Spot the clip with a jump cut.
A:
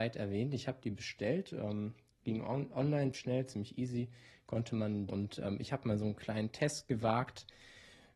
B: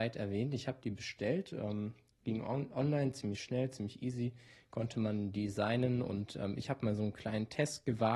A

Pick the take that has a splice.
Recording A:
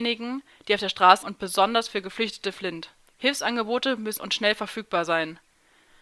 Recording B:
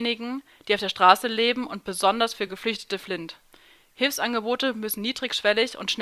A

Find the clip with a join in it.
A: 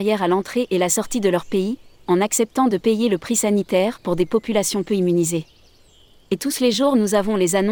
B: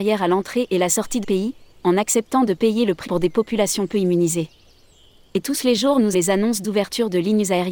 B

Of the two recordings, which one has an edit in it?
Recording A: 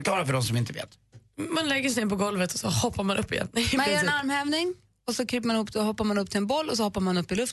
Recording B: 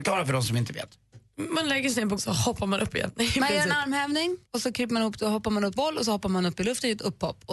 B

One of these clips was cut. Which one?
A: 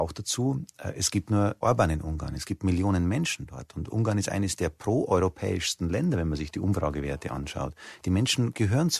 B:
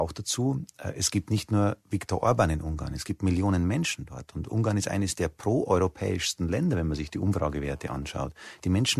A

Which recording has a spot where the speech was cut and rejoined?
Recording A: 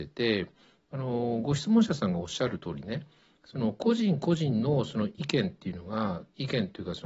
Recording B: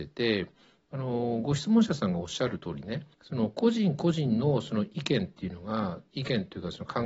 B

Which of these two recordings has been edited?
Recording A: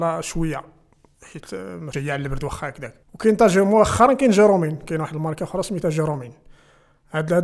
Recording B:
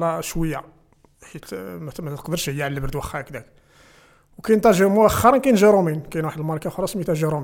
A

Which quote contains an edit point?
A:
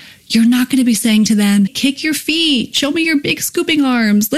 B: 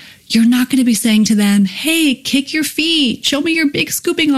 A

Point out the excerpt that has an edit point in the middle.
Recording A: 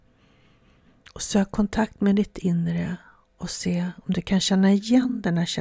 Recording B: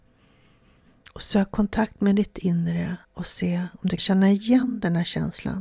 B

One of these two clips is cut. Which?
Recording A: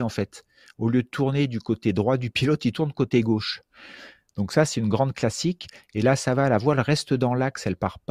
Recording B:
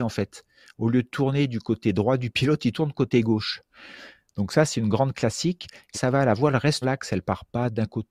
B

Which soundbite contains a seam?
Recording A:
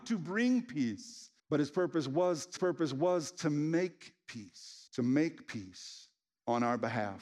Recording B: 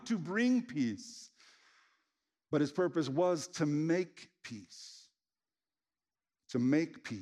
A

